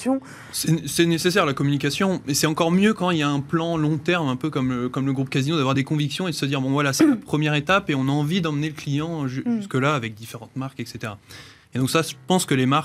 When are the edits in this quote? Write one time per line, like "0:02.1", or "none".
none